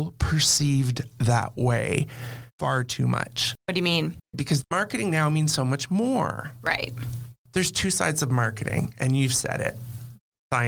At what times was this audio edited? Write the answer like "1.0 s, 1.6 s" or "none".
2.5 s, 3.6 s, 7.4 s